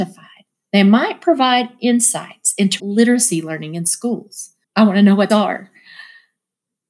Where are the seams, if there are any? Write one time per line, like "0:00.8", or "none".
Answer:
0:02.8
0:04.6
0:05.3